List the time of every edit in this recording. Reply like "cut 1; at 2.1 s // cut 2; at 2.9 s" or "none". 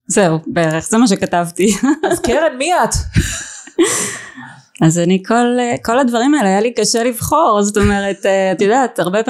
none

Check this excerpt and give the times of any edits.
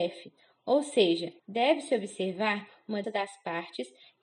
cut 1; at 1.4 s // cut 2; at 3.0 s

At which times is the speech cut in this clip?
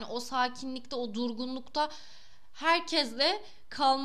none

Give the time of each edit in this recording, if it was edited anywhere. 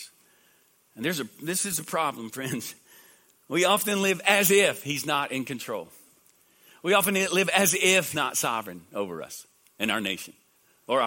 cut 1; at 8.1 s

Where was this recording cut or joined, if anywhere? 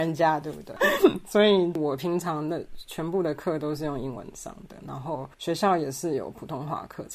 cut 1; at 5.3 s

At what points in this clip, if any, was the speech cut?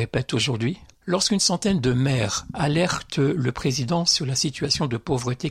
cut 1; at 0.9 s

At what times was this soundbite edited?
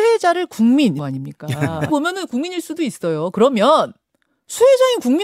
cut 1; at 1.0 s // cut 2; at 1.9 s

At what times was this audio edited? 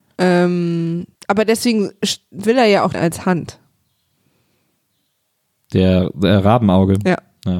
cut 1; at 1.1 s // cut 2; at 2.9 s

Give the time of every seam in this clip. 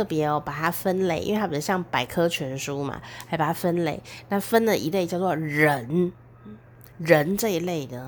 cut 1; at 6.9 s

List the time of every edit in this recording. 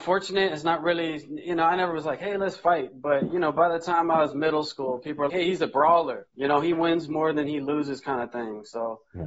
cut 1; at 5.3 s // cut 2; at 6.3 s

